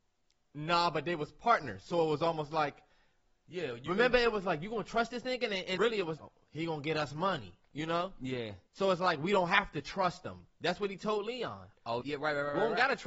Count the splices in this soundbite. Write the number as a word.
four